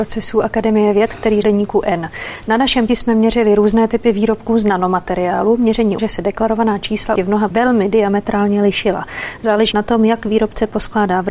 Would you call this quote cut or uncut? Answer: cut